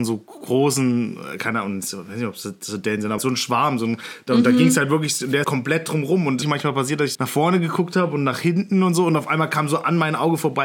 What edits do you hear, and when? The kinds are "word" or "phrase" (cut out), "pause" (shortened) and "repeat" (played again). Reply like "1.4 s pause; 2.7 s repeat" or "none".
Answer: 3.2 s word; 5.4 s word; 6.4 s phrase; 7.1 s word